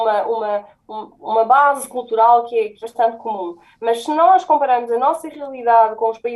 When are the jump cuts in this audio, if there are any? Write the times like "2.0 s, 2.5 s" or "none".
2.8 s